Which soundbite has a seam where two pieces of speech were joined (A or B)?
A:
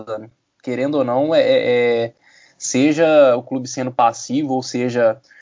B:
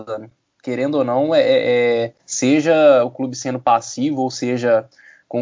B